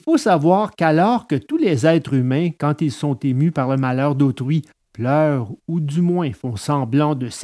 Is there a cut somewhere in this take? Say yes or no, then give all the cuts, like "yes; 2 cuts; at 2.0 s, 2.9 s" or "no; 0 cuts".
no; 0 cuts